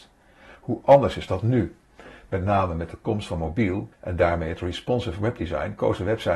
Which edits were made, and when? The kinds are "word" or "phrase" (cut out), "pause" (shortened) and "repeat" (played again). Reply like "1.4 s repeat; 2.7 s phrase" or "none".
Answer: 3.9 s pause